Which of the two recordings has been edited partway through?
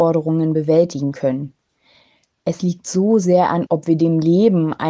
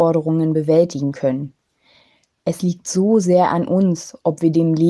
first; 1 cut; at 3.7 s

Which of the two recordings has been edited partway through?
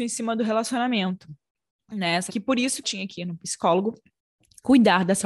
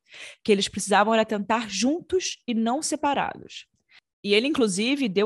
first; 2 cuts; at 2.3 s, 2.8 s

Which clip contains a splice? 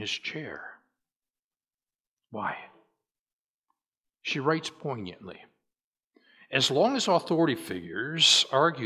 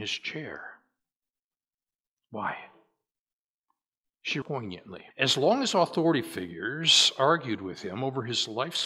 second; 2 cuts; at 4.4 s, 5.1 s

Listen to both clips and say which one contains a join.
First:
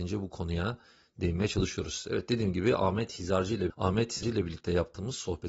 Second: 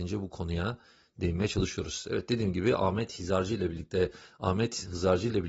first; 2 cuts; at 3.7 s, 4.2 s

